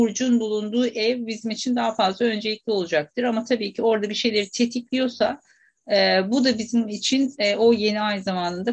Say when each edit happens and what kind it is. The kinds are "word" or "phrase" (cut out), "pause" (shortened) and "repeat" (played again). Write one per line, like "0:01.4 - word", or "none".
none